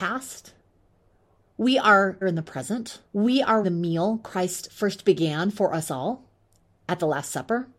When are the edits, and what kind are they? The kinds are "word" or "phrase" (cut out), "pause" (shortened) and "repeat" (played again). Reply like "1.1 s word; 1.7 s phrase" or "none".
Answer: 2.2 s phrase; 3.1 s pause; 3.6 s word